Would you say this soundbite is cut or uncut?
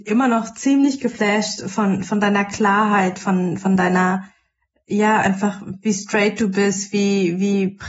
uncut